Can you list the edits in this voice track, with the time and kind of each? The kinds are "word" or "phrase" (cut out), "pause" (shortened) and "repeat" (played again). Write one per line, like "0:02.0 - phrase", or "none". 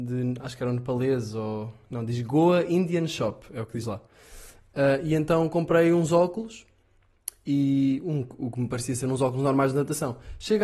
none